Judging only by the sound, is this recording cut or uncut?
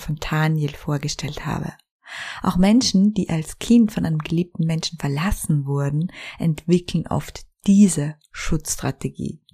uncut